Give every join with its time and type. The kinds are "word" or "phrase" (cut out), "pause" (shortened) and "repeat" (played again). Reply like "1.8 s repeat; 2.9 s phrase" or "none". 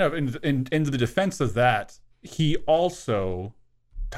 2.1 s pause